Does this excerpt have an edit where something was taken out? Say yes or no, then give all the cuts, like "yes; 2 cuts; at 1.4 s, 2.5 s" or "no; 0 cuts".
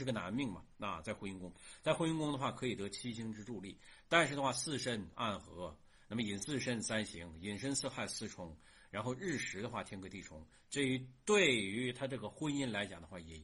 no; 0 cuts